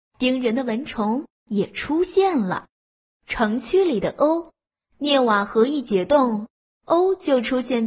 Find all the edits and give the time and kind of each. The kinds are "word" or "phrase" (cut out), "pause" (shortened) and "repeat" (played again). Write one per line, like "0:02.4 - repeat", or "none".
0:02.8 - pause
0:04.6 - pause